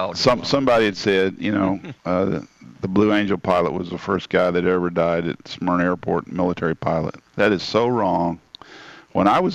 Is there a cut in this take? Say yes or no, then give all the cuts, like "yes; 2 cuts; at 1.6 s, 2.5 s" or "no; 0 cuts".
yes; 2 cuts; at 2.0 s, 7.3 s